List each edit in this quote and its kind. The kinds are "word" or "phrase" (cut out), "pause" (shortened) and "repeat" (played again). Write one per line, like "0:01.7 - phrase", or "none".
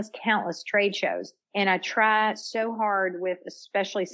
0:01.4 - pause